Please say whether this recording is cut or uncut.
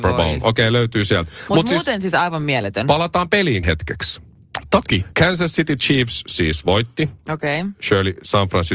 cut